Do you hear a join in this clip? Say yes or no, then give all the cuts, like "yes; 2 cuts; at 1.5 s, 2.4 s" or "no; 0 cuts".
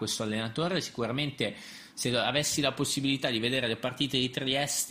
no; 0 cuts